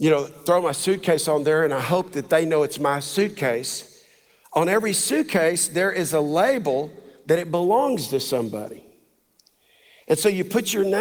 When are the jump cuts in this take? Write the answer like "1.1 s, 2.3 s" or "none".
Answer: none